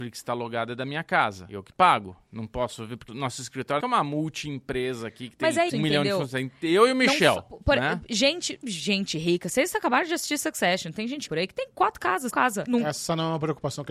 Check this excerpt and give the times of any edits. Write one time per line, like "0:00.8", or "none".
0:03.1
0:03.8
0:05.7
0:08.6
0:11.3
0:12.3

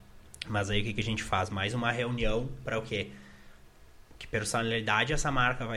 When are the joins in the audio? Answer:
none

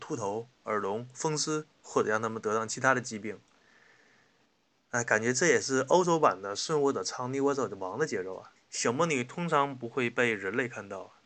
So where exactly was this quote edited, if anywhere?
0:08.6

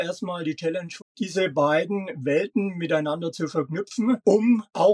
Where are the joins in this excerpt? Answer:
0:01.0

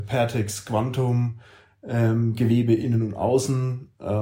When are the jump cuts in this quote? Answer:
none

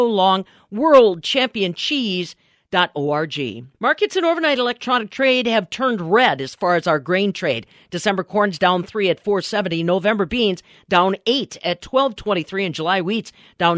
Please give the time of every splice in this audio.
0:03.7

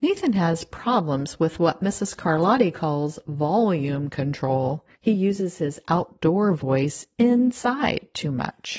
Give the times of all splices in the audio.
0:05.0

